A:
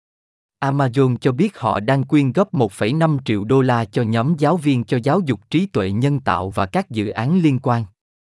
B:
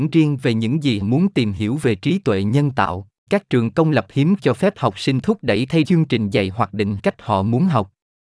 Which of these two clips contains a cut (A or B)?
B